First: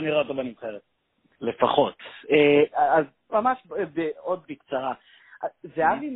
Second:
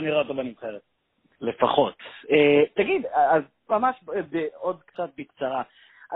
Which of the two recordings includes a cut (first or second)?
first